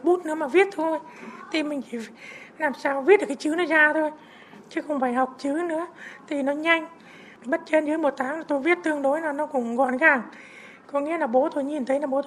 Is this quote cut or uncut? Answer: cut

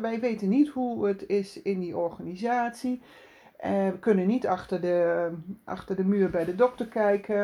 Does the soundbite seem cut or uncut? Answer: uncut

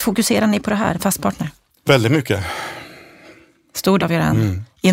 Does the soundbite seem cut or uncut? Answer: cut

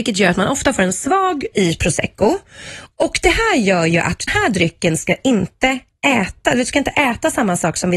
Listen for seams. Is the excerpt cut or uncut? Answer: cut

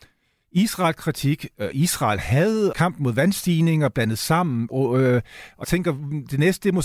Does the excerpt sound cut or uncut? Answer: cut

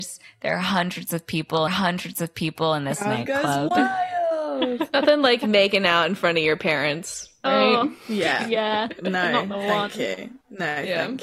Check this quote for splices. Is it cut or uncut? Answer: cut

